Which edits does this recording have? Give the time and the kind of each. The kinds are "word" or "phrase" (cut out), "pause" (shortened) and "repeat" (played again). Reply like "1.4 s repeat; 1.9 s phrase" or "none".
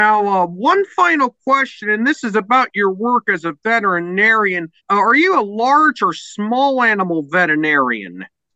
4.8 s pause